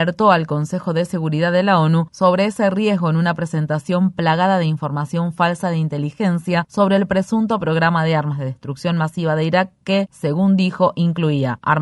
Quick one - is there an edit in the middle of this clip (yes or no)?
no